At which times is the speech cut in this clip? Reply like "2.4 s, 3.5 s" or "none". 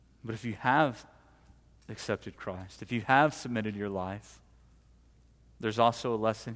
none